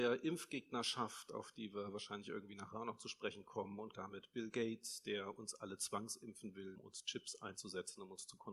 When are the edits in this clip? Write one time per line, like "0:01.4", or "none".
0:03.9
0:06.7